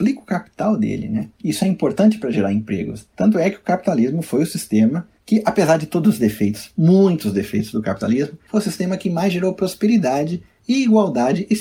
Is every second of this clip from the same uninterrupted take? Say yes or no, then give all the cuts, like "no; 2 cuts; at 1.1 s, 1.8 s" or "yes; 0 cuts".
yes; 0 cuts